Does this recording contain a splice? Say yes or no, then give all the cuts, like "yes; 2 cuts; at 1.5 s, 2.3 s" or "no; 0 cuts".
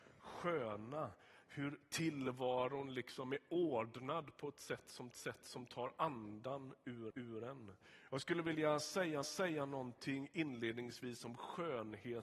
yes; 3 cuts; at 5.1 s, 7.1 s, 9.2 s